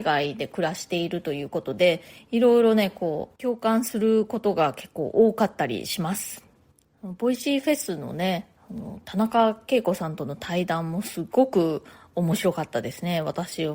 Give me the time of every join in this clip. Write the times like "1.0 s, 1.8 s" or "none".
none

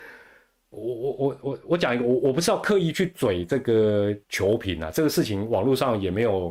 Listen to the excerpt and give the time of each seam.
4.2 s

